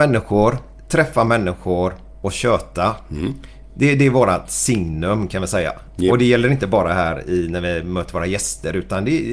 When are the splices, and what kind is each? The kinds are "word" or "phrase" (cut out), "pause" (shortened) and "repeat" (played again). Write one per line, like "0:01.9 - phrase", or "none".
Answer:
none